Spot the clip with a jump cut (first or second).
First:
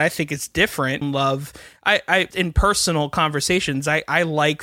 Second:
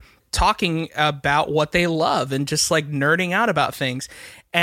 first